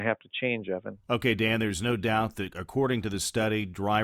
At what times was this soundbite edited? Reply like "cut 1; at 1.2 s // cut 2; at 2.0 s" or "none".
cut 1; at 1.0 s

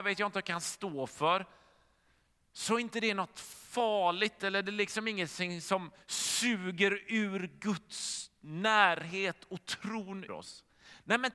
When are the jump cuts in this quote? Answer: cut 1; at 6.0 s // cut 2; at 10.3 s

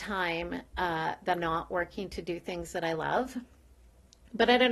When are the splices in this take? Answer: cut 1; at 1.4 s

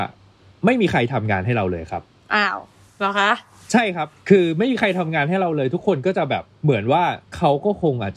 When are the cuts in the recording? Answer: cut 1; at 6.5 s // cut 2; at 7.2 s

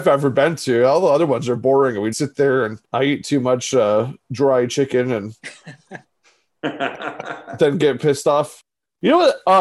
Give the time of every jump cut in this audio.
cut 1; at 2.1 s

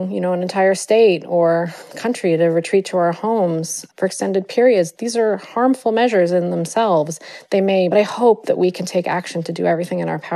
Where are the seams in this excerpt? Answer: cut 1; at 3.9 s // cut 2; at 7.9 s

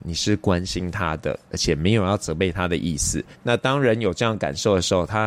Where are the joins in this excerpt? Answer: cut 1; at 1.4 s // cut 2; at 3.3 s

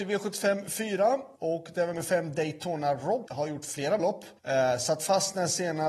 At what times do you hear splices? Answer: cut 1; at 1.4 s // cut 2; at 1.9 s // cut 3; at 3.3 s // cut 4; at 4.0 s // cut 5; at 4.4 s

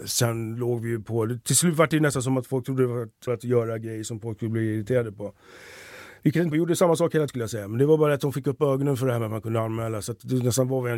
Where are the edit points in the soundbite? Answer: cut 1; at 3.3 s // cut 2; at 6.5 s // cut 3; at 7.3 s

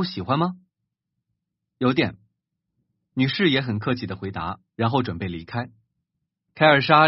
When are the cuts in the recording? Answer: cut 1; at 4.7 s

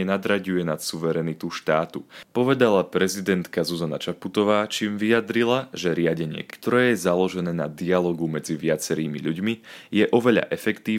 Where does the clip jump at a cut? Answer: cut 1; at 6.5 s

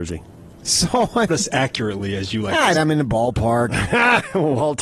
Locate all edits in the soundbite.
cut 1; at 1.3 s // cut 2; at 2.7 s

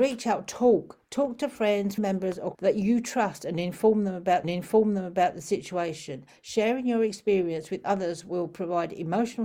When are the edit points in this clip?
cut 1; at 2.0 s // cut 2; at 2.5 s // cut 3; at 4.4 s

